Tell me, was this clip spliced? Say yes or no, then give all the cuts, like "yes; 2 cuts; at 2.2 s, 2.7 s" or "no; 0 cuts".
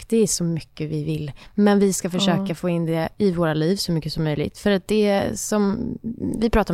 no; 0 cuts